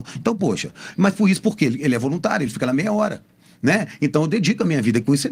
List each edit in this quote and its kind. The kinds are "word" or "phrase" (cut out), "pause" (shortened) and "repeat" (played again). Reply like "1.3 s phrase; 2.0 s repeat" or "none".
none